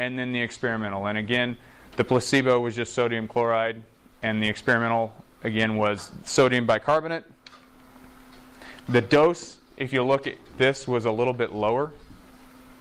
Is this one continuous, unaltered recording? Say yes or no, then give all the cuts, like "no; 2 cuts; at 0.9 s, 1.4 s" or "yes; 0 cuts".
yes; 0 cuts